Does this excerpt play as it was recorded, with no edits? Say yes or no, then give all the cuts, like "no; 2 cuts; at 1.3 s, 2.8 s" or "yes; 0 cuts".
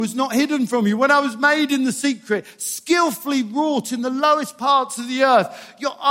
yes; 0 cuts